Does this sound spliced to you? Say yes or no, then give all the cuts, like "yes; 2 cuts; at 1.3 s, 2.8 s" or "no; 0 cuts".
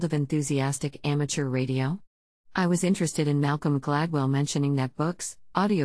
no; 0 cuts